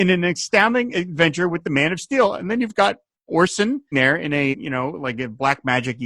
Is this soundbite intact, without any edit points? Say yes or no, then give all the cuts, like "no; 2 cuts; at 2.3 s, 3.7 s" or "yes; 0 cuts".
no; 2 cuts; at 3.9 s, 4.5 s